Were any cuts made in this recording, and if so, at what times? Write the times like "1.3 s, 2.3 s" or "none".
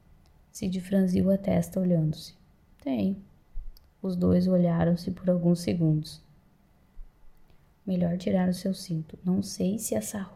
none